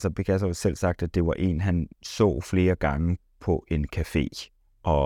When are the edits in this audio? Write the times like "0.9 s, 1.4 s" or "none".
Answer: 1.9 s

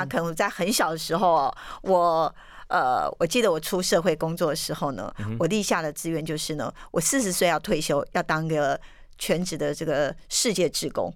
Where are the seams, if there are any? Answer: none

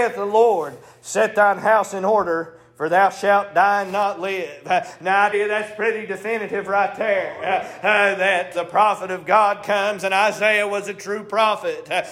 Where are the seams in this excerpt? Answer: 5.3 s, 8.5 s

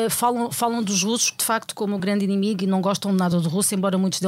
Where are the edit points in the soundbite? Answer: none

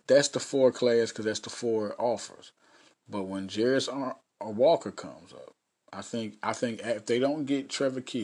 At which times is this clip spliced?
none

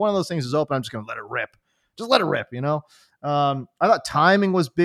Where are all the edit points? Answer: none

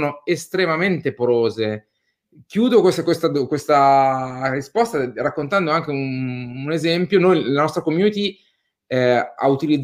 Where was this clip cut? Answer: none

